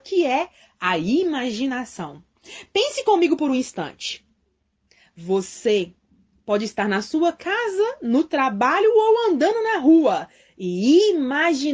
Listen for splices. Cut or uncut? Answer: uncut